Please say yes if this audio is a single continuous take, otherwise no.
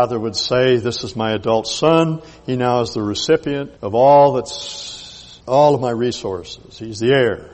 no